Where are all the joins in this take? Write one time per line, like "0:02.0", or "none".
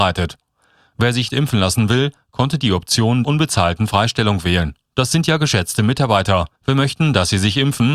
0:01.3
0:03.2
0:04.8
0:06.5